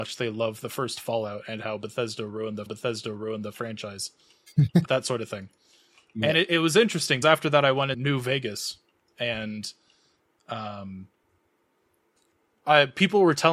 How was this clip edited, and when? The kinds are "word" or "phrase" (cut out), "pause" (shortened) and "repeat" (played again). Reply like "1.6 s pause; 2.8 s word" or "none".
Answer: 2.7 s repeat; 4.8 s word; 7.2 s word; 7.9 s word

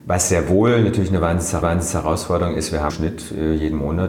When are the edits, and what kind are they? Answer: 1.6 s repeat; 2.9 s word

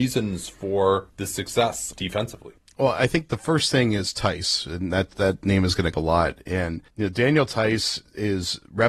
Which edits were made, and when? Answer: 1.9 s word; 5.9 s phrase

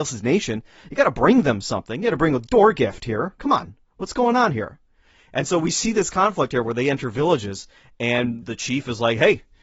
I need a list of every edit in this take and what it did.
8.4 s word

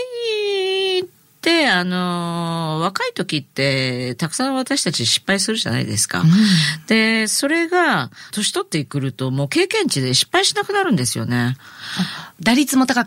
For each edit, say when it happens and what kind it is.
none

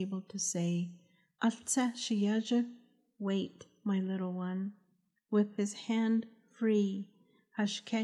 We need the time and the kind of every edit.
none

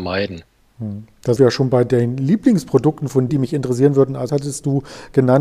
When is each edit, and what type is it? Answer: 1.4 s word; 3.3 s word; 4.3 s word

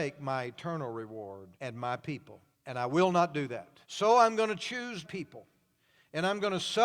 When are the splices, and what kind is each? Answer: 1.5 s pause; 2.5 s pause; 3.8 s pause; 5.0 s word

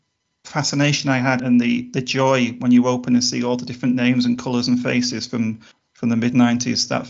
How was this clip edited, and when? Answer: 1.4 s word; 5.7 s pause

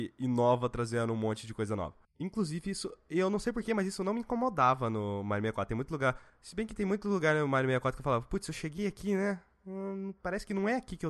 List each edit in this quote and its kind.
none

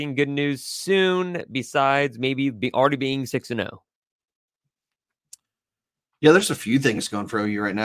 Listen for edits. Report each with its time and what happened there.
none

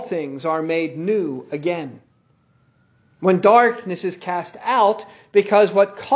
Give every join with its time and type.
none

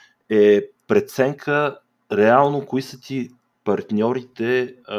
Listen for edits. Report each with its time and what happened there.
none

